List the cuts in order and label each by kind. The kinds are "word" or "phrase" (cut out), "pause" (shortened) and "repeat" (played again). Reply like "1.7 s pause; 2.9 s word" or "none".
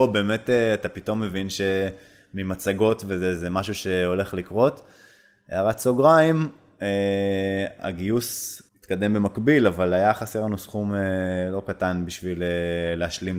8.7 s pause